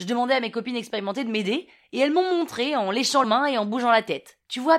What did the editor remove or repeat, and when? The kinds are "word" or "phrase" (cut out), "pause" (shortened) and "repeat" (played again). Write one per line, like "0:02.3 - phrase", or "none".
0:03.2 - word